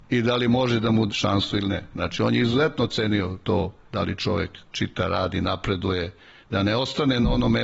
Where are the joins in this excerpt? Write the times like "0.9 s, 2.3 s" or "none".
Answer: 1.1 s